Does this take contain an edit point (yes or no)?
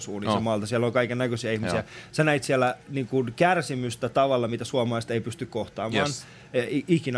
no